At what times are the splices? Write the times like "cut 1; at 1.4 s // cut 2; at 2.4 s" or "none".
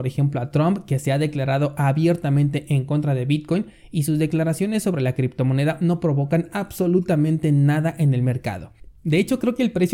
none